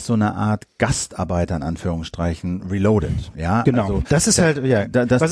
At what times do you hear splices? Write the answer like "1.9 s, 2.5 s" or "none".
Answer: none